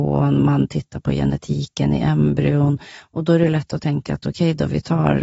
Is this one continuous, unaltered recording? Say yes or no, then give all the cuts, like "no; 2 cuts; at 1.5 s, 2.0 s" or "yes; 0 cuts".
yes; 0 cuts